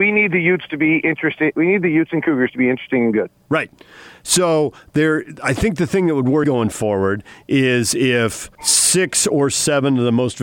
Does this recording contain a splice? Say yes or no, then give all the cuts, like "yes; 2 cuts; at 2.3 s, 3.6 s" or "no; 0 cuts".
yes; 2 cuts; at 6.4 s, 8.5 s